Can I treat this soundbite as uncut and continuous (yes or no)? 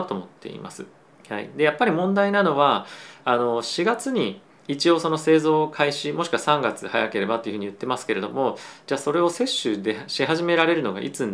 no